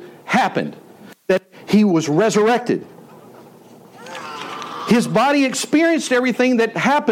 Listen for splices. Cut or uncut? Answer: uncut